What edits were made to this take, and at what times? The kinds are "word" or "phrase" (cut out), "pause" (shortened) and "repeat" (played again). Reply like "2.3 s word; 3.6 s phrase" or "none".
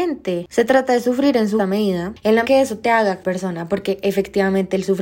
1.6 s word; 2.4 s word; 3.2 s phrase

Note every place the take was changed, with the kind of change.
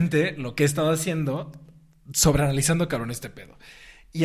none

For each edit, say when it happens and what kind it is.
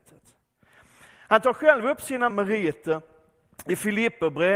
2.3 s word

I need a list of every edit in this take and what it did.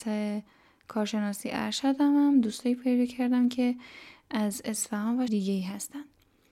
5.3 s word

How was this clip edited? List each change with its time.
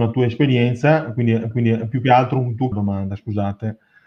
1.5 s repeat; 2.7 s phrase

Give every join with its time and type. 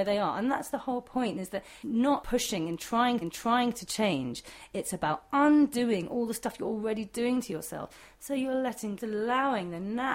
1.8 s word; 2.2 s word; 3.2 s repeat; 9.0 s phrase

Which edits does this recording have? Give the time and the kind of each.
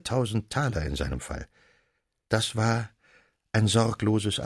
none

